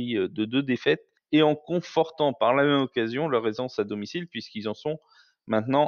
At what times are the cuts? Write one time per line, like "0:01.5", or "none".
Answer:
0:01.2